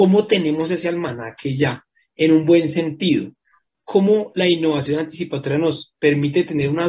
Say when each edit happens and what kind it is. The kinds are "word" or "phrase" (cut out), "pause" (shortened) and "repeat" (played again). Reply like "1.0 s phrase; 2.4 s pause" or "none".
none